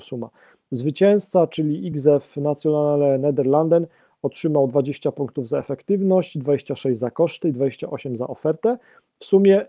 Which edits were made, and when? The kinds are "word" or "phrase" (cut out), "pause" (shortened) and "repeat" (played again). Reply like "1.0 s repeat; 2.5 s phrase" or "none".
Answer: none